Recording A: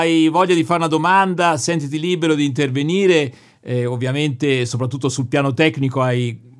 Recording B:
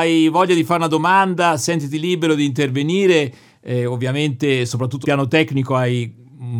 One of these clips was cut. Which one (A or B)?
B